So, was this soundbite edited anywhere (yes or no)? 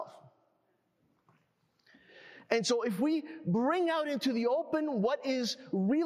no